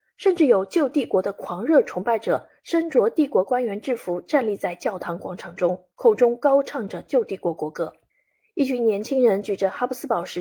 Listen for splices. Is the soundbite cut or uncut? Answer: cut